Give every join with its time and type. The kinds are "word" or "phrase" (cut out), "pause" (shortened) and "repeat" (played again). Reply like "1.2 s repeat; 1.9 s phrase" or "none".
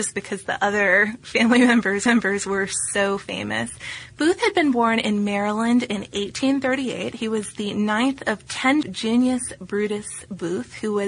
2.1 s repeat; 8.8 s phrase

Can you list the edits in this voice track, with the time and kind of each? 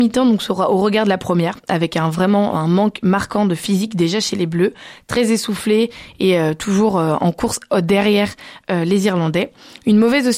none

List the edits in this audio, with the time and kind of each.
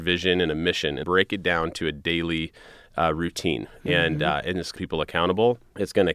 1.0 s word; 4.8 s phrase

